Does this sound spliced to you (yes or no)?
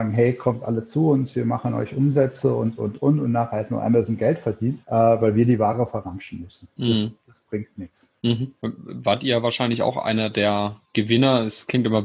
yes